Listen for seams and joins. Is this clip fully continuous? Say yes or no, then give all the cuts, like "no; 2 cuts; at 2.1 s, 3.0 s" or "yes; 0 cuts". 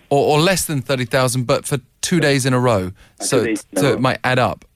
yes; 0 cuts